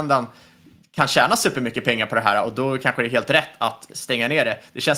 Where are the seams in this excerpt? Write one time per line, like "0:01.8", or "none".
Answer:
none